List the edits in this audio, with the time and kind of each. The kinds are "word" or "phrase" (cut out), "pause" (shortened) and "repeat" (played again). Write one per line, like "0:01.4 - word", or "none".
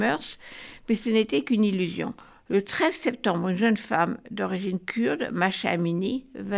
none